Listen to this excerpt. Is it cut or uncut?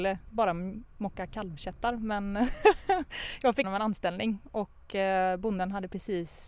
cut